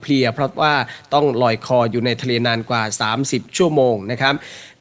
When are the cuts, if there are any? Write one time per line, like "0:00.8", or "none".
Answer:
0:03.5